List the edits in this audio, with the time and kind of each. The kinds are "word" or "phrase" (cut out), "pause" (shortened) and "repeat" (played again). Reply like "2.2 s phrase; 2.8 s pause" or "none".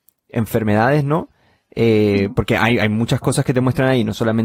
none